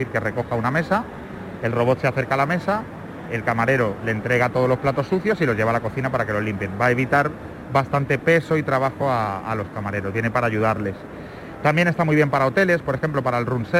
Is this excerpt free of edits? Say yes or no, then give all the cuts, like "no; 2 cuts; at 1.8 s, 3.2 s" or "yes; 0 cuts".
yes; 0 cuts